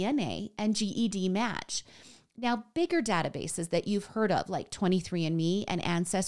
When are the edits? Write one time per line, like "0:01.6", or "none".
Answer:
none